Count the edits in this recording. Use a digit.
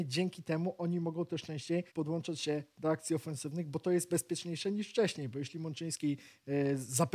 1